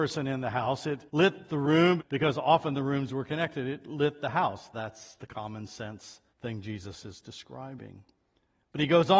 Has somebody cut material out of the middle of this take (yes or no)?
yes